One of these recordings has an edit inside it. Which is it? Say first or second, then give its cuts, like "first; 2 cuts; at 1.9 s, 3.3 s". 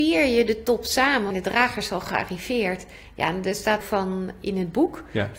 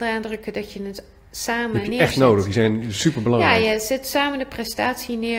first; 2 cuts; at 1.3 s, 3.8 s